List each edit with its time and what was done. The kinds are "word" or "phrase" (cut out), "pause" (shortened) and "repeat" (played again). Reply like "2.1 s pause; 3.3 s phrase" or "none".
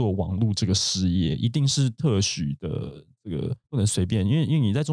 3.6 s pause